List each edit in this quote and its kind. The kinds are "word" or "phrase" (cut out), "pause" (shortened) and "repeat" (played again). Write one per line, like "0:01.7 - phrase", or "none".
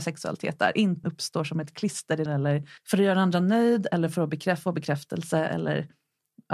0:01.0 - phrase
0:02.3 - word
0:02.8 - pause